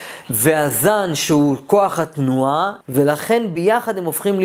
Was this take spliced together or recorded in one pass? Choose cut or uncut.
cut